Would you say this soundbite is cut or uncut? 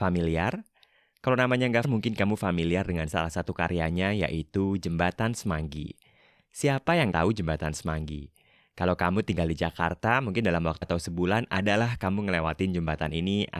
cut